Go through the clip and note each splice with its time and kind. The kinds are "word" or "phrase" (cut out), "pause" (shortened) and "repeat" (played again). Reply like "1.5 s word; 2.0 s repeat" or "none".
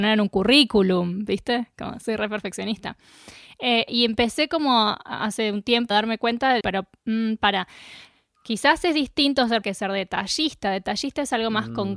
3.9 s word; 5.9 s word; 6.6 s word; 9.6 s word